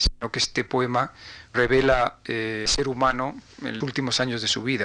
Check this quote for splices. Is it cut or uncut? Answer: cut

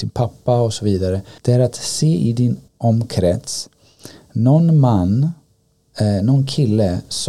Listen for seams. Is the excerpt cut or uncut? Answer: cut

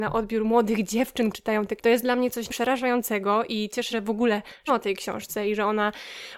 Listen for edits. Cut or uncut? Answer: cut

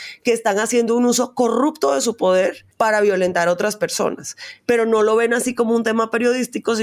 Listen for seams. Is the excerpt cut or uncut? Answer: cut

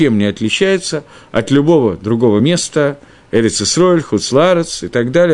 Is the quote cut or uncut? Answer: uncut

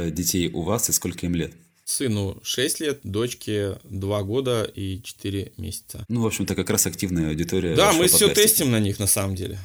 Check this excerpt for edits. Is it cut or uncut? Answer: uncut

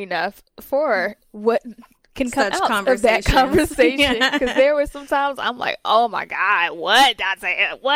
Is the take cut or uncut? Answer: uncut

